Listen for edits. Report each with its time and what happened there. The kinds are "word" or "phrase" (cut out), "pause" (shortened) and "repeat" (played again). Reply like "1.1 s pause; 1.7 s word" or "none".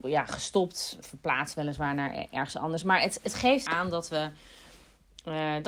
1.0 s word; 3.7 s phrase